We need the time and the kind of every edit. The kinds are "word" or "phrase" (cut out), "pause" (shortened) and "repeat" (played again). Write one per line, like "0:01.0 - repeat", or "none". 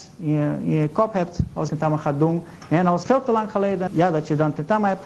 0:01.7 - phrase
0:03.0 - word
0:03.9 - phrase